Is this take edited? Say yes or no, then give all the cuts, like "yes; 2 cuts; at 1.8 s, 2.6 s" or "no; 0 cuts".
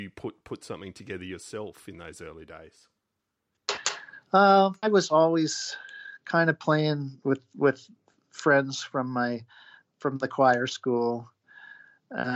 no; 0 cuts